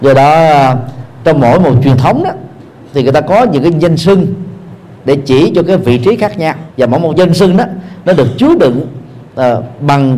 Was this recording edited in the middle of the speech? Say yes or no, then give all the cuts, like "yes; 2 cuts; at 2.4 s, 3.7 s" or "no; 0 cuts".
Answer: yes; 1 cut; at 6.7 s